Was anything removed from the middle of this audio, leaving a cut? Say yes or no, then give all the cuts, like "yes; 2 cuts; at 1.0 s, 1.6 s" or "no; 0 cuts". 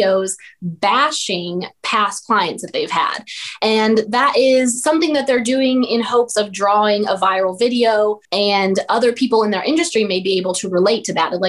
yes; 1 cut; at 8.2 s